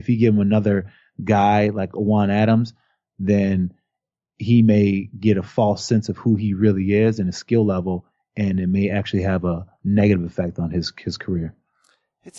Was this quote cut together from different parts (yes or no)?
no